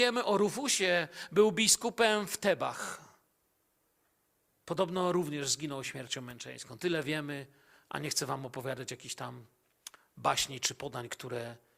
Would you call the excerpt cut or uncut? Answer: uncut